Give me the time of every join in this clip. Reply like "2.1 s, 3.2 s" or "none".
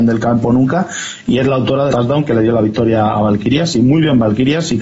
1.9 s